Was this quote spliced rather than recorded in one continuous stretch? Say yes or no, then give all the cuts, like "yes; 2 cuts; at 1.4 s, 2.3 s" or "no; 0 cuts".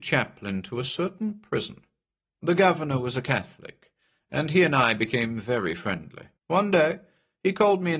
yes; 1 cut; at 6.4 s